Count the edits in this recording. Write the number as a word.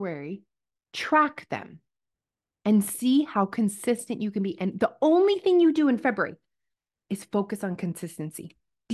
zero